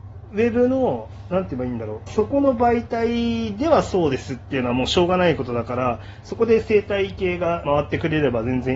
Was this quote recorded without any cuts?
no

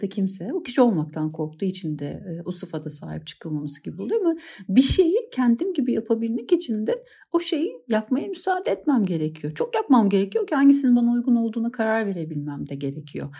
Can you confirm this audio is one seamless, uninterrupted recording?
yes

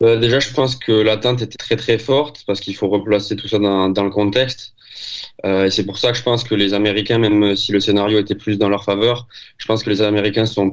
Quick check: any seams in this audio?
yes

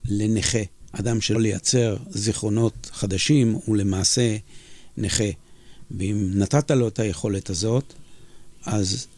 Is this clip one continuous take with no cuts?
no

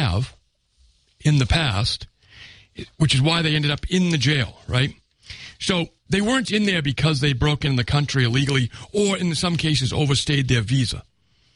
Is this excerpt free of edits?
no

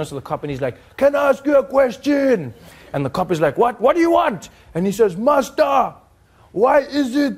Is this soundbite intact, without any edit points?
yes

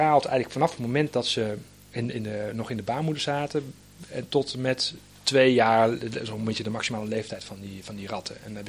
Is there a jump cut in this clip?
no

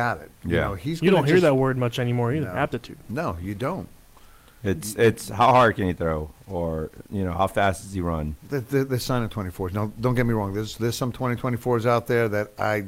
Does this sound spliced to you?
yes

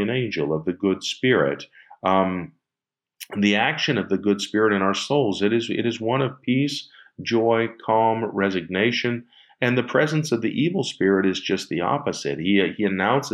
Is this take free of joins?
yes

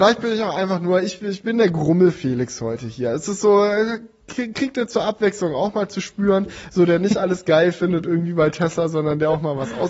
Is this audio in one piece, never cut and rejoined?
yes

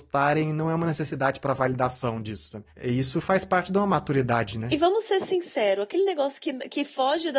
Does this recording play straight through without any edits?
yes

